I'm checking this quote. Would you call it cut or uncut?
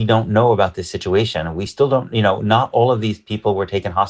uncut